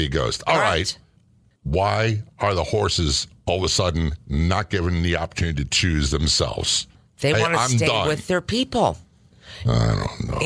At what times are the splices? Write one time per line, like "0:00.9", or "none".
none